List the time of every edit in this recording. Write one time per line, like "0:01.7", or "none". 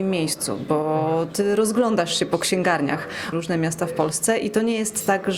0:03.3